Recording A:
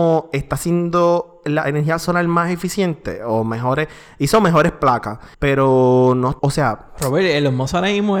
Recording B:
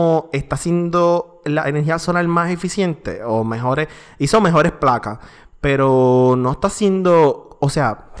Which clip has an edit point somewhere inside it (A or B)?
A